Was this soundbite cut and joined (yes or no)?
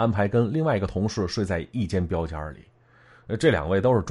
no